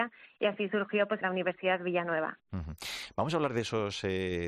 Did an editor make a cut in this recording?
yes; 1 cut; at 1.2 s

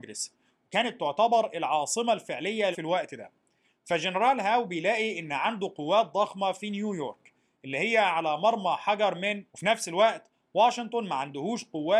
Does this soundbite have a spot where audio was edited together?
yes; 2 cuts; at 2.7 s, 9.5 s

